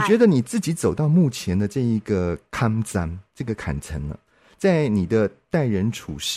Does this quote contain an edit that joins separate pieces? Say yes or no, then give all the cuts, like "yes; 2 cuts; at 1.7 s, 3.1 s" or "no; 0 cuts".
no; 0 cuts